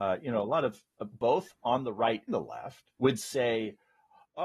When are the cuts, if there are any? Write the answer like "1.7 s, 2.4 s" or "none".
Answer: 1.1 s, 2.3 s, 3.0 s